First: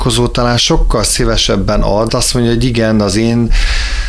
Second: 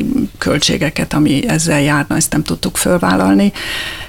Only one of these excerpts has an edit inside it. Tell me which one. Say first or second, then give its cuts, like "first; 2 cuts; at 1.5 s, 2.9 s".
first; 1 cut; at 2.1 s